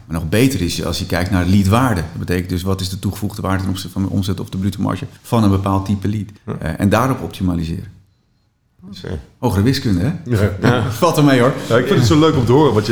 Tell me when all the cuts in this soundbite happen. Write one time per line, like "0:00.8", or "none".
0:05.2
0:06.4